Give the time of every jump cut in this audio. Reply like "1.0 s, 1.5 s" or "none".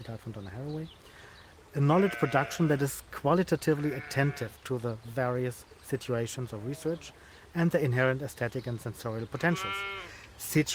none